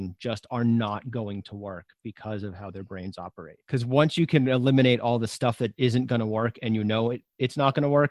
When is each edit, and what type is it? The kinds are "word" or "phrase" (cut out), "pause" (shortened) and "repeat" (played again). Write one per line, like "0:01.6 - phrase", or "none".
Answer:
0:03.6 - pause